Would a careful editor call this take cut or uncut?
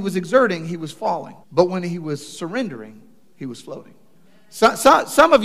cut